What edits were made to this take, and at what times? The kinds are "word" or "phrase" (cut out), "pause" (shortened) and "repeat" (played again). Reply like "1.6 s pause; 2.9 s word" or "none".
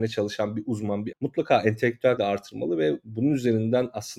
1.1 s word; 2.2 s word